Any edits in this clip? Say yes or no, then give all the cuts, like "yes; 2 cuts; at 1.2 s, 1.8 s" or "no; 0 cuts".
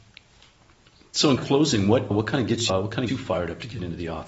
yes; 4 cuts; at 1.4 s, 2.1 s, 2.7 s, 3.1 s